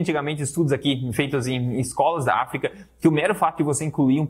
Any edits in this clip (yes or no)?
no